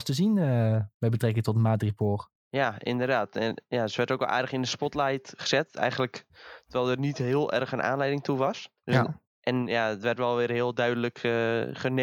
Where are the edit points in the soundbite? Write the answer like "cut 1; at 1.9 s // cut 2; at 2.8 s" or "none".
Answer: cut 1; at 2.4 s // cut 2; at 8.8 s